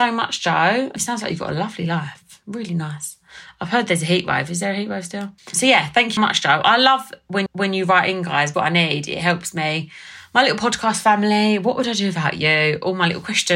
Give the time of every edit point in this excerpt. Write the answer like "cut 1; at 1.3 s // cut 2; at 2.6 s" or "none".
cut 1; at 5.4 s // cut 2; at 6.2 s // cut 3; at 7.5 s // cut 4; at 8.5 s